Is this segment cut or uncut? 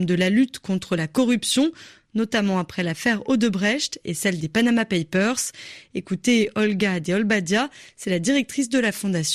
uncut